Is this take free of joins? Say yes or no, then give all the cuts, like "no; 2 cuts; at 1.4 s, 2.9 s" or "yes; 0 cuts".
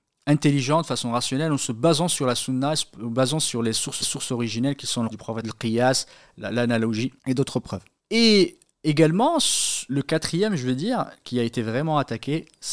no; 6 cuts; at 4.0 s, 5.1 s, 5.4 s, 7.2 s, 8.0 s, 9.9 s